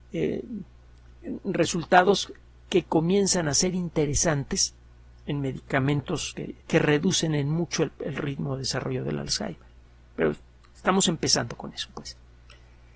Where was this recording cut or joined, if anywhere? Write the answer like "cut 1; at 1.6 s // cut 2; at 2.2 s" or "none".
cut 1; at 6.6 s